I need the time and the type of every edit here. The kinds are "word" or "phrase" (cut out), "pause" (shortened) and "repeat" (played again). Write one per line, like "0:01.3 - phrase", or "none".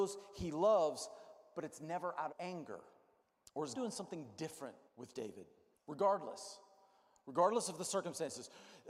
0:02.3 - word
0:03.2 - pause
0:03.7 - word
0:04.9 - pause
0:05.7 - pause